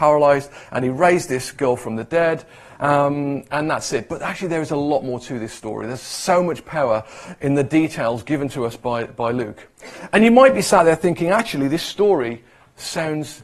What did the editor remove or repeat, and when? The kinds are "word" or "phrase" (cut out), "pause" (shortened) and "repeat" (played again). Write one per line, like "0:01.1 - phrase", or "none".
none